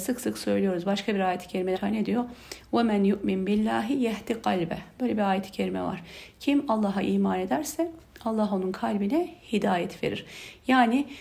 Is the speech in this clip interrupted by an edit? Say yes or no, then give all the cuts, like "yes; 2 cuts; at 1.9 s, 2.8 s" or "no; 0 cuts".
yes; 1 cut; at 1.8 s